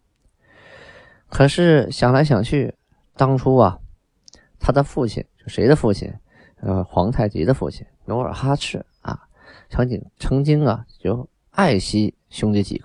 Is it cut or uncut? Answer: cut